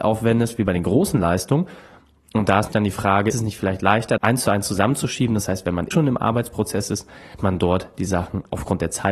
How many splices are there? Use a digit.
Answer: 5